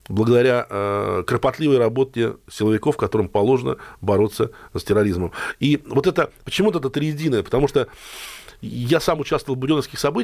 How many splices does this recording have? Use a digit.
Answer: 0